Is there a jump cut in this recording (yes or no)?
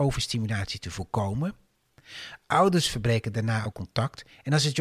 yes